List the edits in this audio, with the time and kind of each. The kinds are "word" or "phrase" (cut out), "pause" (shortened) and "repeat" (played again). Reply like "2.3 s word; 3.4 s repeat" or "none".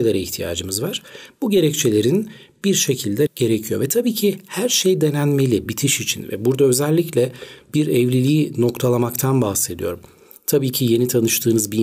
3.3 s word; 5.7 s word